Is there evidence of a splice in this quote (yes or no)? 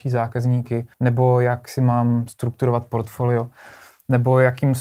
yes